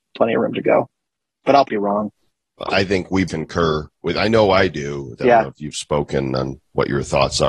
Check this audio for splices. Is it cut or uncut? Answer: cut